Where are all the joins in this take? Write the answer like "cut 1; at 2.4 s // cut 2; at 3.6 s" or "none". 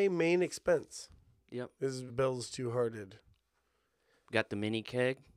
cut 1; at 2.1 s